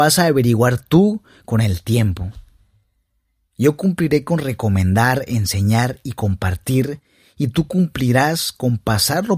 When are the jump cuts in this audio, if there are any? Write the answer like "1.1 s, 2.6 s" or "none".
none